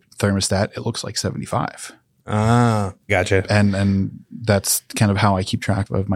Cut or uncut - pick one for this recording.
cut